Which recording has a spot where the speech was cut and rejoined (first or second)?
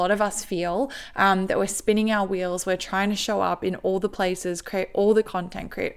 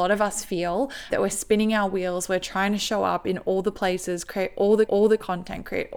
second